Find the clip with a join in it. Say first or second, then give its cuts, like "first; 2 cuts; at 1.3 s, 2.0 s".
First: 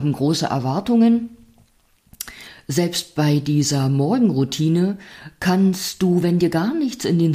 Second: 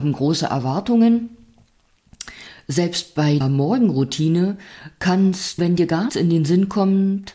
second; 3 cuts; at 3.4 s, 5.6 s, 6.1 s